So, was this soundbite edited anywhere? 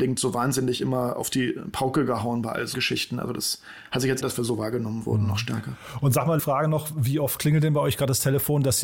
yes; 3 cuts; at 2.7 s, 4.2 s, 6.4 s

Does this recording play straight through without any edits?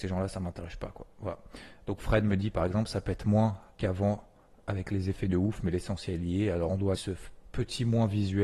no; 1 cut; at 7.0 s

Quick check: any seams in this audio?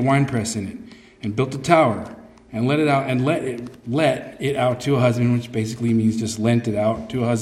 no; 0 cuts

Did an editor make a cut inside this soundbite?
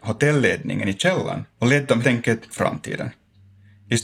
yes; 3 cuts; at 1.5 s, 2.0 s, 2.5 s

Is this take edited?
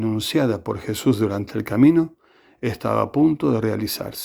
no; 0 cuts

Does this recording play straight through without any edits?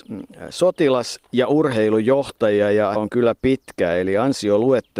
no; 1 cut; at 3.0 s

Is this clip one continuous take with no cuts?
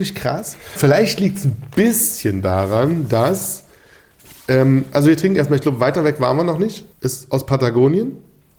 no; 1 cut; at 6.9 s

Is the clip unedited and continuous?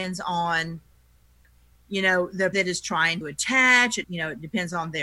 no; 3 cuts; at 2.5 s, 3.2 s, 4.0 s

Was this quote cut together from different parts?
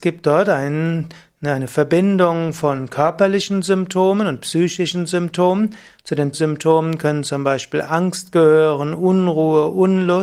yes; 1 cut; at 6.3 s

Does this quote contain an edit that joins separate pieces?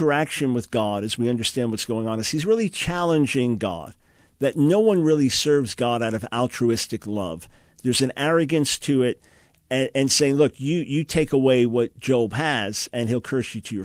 no; 0 cuts

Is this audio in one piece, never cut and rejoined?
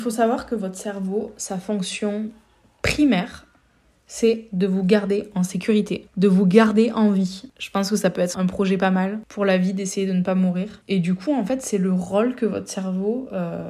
no; 1 cut; at 8.3 s

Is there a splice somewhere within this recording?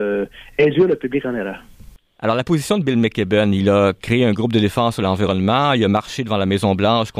no; 0 cuts

